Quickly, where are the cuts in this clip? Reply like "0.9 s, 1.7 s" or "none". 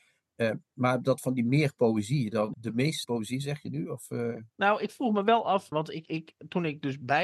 2.5 s, 3.0 s, 4.5 s, 5.7 s, 6.1 s